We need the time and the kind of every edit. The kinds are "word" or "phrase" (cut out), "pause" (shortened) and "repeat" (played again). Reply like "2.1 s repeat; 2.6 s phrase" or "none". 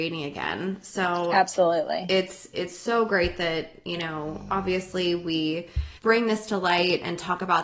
6.0 s pause